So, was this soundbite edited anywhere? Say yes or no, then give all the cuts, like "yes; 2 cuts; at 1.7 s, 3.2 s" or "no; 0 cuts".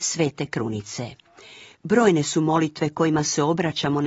no; 0 cuts